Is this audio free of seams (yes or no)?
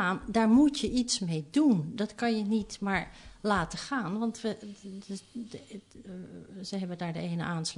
yes